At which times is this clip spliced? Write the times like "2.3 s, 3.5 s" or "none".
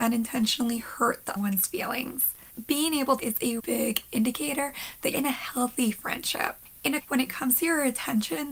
1.4 s, 3.2 s, 3.6 s, 5.1 s, 7.1 s

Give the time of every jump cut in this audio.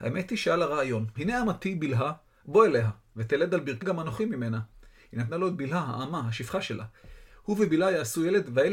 1.2 s, 3.8 s

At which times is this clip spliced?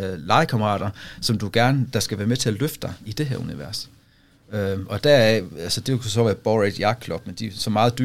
none

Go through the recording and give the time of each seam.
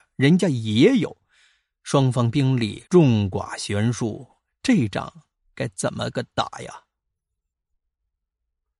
2.9 s

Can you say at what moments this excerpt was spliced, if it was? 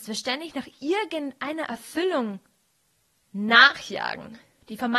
none

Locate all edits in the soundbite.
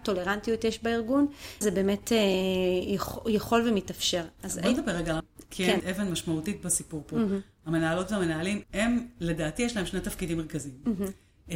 1.6 s, 5.2 s, 5.8 s, 8.6 s

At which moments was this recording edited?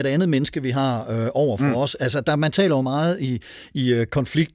none

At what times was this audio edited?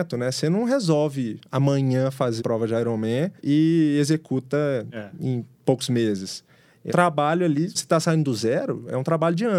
2.4 s, 3.4 s, 6.9 s, 7.7 s

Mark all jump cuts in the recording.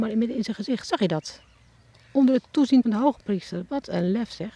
1.9 s, 2.8 s

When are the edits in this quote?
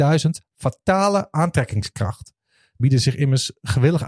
2.8 s

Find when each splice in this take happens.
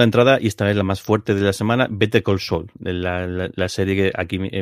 none

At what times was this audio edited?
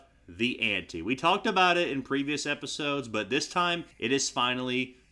3.9 s

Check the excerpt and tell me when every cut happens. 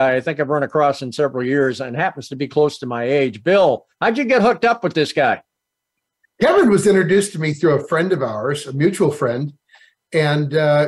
none

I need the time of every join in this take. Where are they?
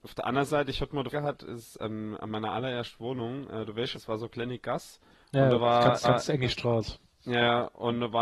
1.1 s, 3.9 s, 5.1 s, 6.0 s

